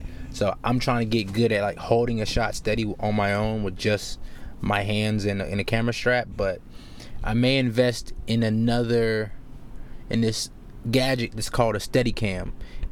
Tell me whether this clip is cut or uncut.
uncut